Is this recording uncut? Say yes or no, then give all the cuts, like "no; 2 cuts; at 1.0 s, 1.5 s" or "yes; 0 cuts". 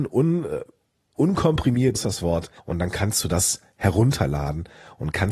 no; 2 cuts; at 1.9 s, 2.6 s